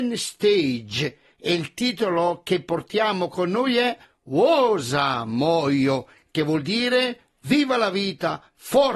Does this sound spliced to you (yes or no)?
no